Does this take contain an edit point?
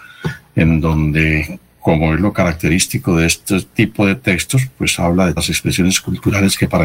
yes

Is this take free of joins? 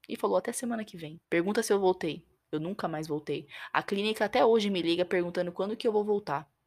no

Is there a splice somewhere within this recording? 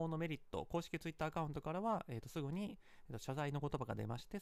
no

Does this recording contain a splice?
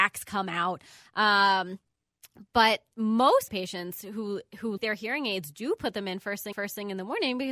yes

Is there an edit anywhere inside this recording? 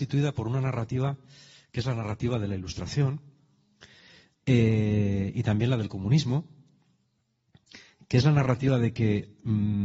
no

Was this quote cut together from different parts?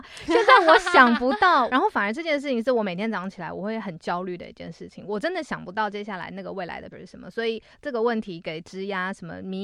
yes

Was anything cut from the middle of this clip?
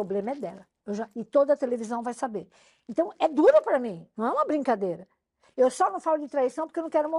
no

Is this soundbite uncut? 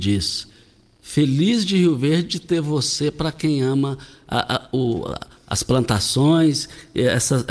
yes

